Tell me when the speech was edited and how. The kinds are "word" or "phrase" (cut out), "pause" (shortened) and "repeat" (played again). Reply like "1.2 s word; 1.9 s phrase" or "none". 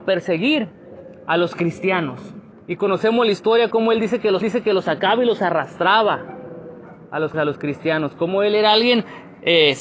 2.5 s pause; 4.4 s repeat; 7.3 s word